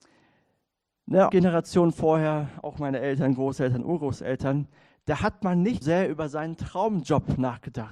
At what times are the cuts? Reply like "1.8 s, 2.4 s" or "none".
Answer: 1.3 s, 5.8 s